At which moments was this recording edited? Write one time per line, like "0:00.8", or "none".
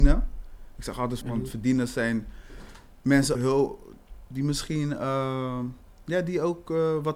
0:01.2
0:03.3